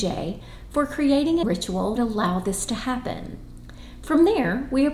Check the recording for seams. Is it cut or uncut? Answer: cut